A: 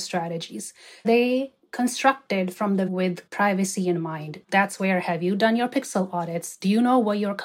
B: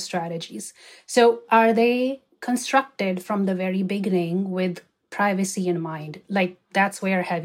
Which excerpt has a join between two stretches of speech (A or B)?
A